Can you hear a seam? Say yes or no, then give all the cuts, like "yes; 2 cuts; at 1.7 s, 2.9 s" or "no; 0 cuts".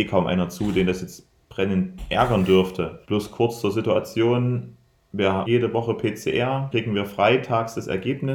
yes; 4 cuts; at 1.4 s, 3.0 s, 5.4 s, 6.7 s